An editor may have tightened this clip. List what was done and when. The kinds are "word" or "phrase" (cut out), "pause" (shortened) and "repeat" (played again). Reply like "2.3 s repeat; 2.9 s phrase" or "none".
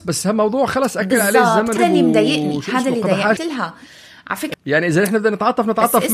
1.8 s word; 3.4 s word; 4.5 s word